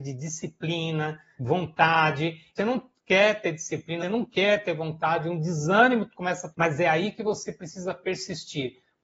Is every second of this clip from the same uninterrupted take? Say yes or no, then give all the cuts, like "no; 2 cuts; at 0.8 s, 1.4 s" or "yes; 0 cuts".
no; 4 cuts; at 1.4 s, 2.6 s, 4.0 s, 6.5 s